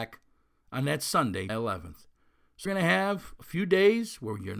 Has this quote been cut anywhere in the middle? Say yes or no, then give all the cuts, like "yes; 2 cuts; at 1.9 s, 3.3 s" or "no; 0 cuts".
yes; 2 cuts; at 1.5 s, 2.7 s